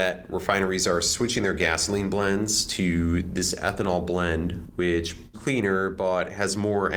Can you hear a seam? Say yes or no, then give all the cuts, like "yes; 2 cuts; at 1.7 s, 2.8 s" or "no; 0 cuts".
yes; 1 cut; at 5.3 s